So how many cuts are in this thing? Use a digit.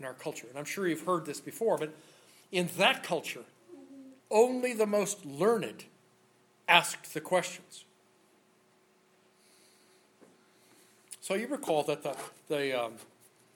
1